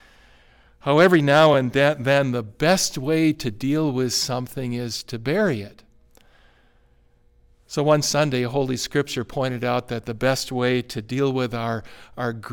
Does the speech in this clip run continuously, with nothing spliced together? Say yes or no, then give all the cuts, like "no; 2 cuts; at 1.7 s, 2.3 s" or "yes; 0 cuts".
yes; 0 cuts